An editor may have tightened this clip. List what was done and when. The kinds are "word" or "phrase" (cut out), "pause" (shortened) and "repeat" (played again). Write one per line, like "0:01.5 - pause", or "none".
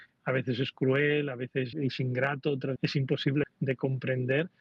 0:01.7 - word
0:02.8 - word
0:03.4 - word